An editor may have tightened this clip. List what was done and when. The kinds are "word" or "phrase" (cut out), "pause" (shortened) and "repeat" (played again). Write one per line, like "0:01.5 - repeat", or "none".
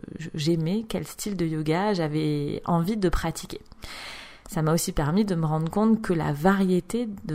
none